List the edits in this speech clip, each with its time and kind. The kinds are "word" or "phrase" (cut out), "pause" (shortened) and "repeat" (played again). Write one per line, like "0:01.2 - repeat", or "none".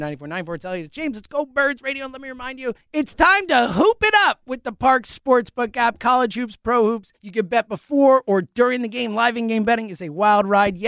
0:02.8 - pause
0:07.2 - pause